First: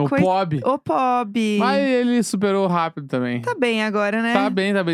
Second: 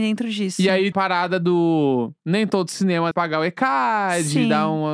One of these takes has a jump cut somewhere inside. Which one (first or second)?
second